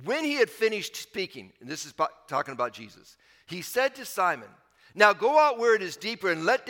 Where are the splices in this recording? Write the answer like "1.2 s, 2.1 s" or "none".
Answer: none